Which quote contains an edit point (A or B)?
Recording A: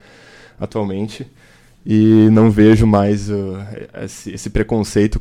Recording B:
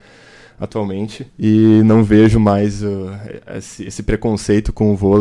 B